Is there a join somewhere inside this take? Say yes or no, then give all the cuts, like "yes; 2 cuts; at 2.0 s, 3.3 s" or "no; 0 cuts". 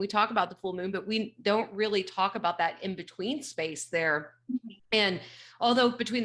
no; 0 cuts